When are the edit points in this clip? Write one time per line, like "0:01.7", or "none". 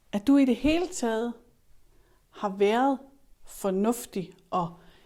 none